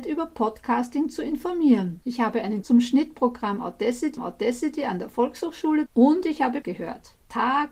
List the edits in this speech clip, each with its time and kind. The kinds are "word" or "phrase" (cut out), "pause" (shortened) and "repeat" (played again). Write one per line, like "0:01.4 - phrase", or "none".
0:02.0 - pause
0:02.6 - word
0:04.2 - repeat
0:05.9 - word
0:06.6 - word

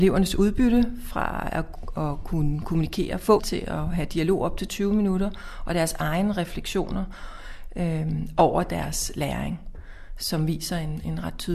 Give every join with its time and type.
0:03.4 - word

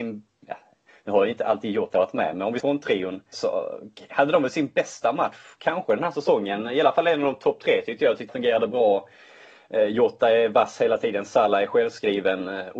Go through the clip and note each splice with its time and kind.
0:02.6 - word
0:03.3 - word
0:08.3 - word

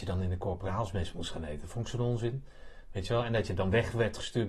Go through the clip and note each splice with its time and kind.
none

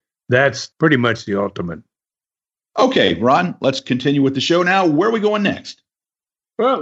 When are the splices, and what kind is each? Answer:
none

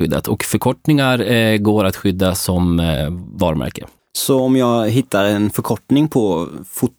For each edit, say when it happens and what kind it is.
0:04.0 - pause

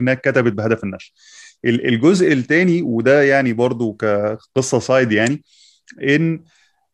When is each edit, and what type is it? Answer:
none

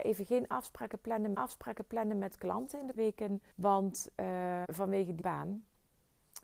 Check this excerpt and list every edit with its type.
0:01.3 - repeat
0:03.0 - word
0:03.5 - pause
0:04.6 - word
0:05.2 - word

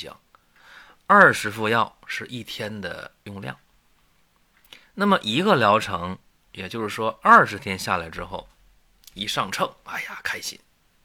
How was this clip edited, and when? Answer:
none

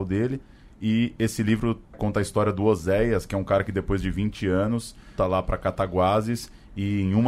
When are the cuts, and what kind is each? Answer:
0:01.9 - word
0:05.2 - word

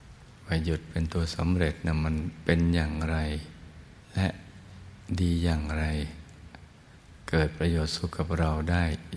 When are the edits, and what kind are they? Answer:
0:04.0 - pause

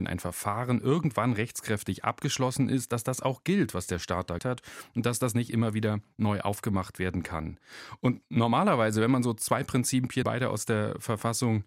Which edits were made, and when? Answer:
0:04.4 - word
0:10.2 - phrase

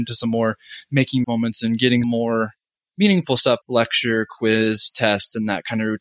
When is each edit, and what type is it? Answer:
0:01.2 - word
0:02.0 - word
0:03.6 - word

